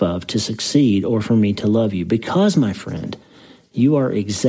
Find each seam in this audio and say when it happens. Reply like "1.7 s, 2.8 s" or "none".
none